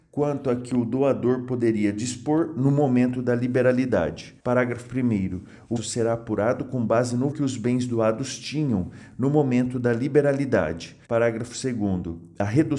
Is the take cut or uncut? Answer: cut